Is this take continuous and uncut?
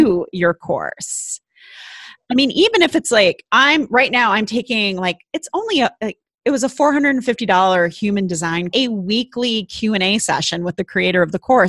no; 1 cut; at 8.7 s

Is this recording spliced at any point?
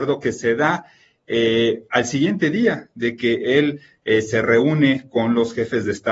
no; 0 cuts

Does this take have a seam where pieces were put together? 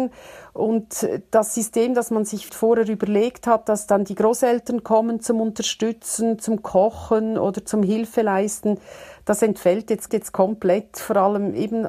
yes; 2 cuts; at 2.5 s, 10.1 s

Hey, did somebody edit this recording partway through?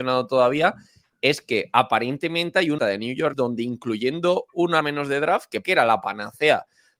yes; 4 cuts; at 2.8 s, 3.3 s, 4.8 s, 5.6 s

